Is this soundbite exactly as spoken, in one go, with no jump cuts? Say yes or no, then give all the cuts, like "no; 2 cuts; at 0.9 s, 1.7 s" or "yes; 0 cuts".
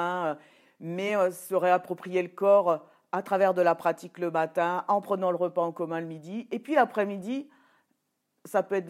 yes; 0 cuts